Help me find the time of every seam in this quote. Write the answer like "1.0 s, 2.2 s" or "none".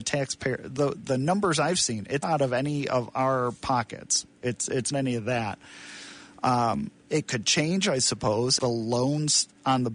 2.2 s, 4.9 s, 8.6 s